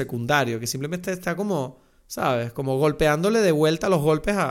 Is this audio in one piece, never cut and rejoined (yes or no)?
yes